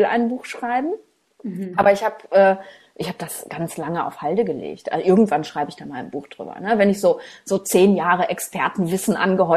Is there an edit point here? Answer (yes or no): no